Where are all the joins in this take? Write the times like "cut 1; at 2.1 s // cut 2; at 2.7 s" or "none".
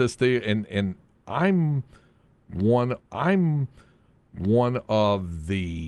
cut 1; at 3.0 s